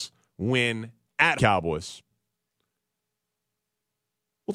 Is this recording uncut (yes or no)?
no